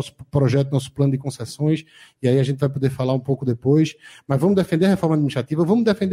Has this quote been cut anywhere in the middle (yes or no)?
no